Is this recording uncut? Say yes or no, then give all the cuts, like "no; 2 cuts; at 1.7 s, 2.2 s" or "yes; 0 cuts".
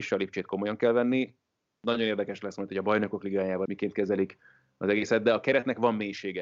no; 1 cut; at 3.7 s